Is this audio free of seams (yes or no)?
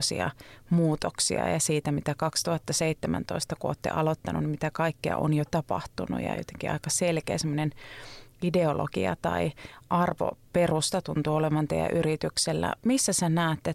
yes